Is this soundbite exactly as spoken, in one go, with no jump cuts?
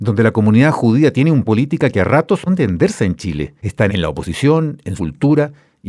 no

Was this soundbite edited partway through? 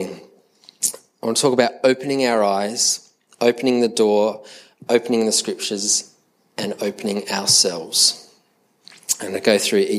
no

